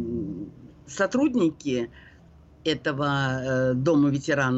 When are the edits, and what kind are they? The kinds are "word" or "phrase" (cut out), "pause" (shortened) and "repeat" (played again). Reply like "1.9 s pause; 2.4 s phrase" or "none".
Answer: 2.2 s pause